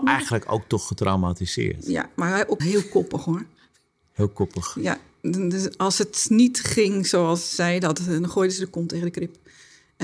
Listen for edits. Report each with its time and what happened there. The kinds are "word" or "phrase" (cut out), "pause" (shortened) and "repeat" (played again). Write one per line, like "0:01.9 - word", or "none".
0:02.6 - word